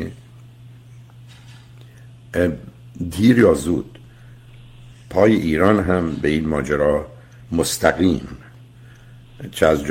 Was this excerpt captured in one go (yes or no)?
yes